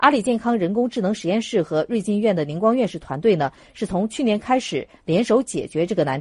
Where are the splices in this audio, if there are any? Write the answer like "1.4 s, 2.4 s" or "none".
none